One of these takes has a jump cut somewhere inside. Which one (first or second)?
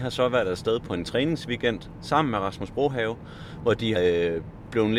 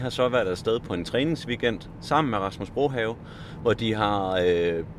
first